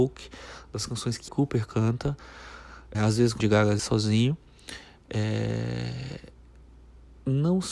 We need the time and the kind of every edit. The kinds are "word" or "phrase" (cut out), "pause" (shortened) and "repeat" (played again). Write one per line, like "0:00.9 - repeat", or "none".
0:01.3 - word
0:02.9 - word
0:03.4 - word
0:03.8 - word